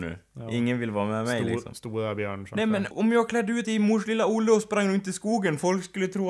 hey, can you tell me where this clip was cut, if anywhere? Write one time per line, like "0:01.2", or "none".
0:02.9
0:03.6

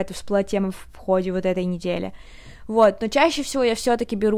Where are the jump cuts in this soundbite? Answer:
none

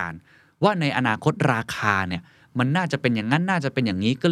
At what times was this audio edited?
none

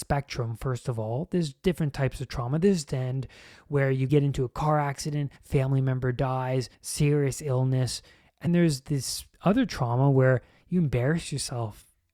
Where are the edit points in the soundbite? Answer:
0:02.9
0:04.1
0:05.4
0:06.7
0:08.5
0:09.3

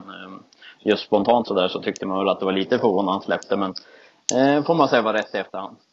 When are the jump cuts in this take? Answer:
none

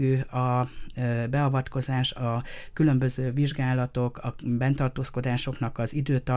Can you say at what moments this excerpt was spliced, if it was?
none

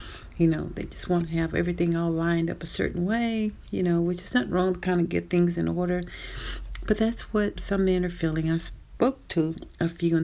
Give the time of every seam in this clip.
0:07.6

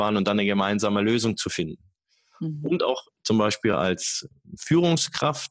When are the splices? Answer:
none

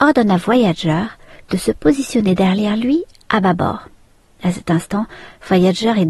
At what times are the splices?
none

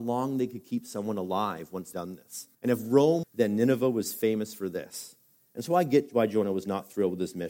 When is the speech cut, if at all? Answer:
0:01.9
0:02.5
0:03.2

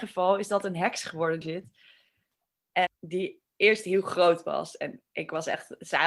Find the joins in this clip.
0:01.4
0:02.9

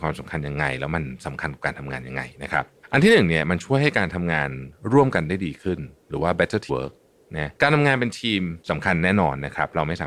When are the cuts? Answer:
0:02.8
0:06.7
0:07.6
0:08.6

